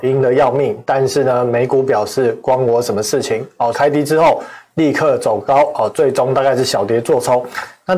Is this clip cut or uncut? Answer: cut